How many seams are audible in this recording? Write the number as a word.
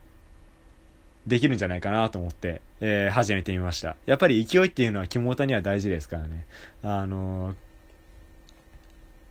one